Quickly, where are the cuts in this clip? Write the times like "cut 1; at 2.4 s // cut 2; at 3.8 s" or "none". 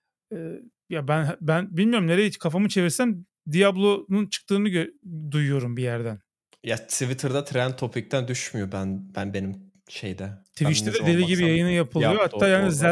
none